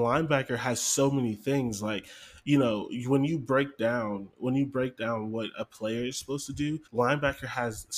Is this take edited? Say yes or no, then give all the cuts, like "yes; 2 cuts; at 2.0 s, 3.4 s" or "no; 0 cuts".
yes; 1 cut; at 6.9 s